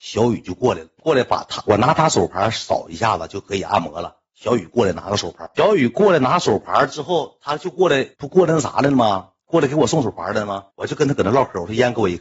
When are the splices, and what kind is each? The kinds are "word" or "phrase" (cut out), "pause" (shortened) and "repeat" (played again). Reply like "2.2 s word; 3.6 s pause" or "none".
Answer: 8.1 s pause; 10.7 s pause